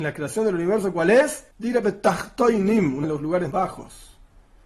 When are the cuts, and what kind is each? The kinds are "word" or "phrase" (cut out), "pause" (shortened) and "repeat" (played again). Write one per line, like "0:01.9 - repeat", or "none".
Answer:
0:01.5 - pause
0:03.0 - word
0:03.5 - word